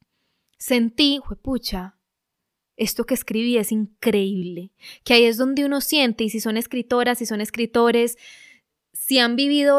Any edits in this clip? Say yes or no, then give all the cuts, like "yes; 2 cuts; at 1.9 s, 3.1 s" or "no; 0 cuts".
no; 0 cuts